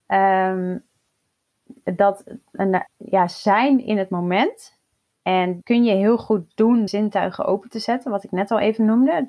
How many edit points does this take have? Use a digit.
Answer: 3